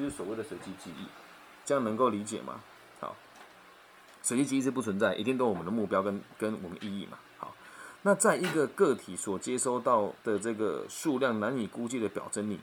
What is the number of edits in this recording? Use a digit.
1